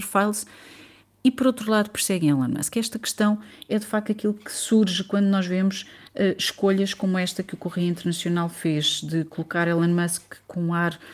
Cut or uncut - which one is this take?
uncut